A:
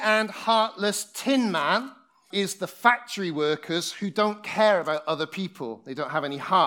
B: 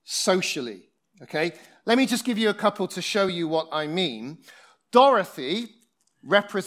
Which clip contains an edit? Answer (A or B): A